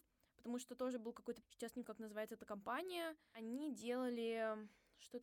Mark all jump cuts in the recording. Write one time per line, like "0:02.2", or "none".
0:01.4
0:01.8

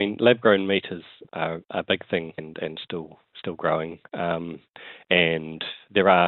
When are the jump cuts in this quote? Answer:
0:01.2
0:02.4

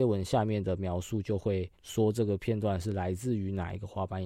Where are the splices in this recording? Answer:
0:01.7

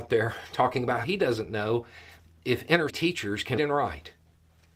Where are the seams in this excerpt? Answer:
0:01.0
0:02.9
0:03.6

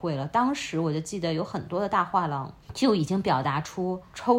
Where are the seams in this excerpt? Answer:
0:02.6

